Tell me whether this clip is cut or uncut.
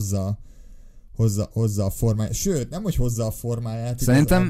uncut